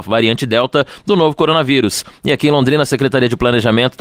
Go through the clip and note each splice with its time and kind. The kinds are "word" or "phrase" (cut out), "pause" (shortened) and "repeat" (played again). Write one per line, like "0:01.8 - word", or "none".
none